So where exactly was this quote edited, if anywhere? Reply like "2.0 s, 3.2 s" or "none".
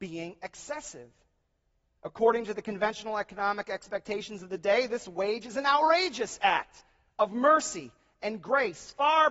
none